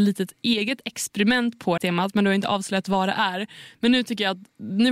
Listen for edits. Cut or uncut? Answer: cut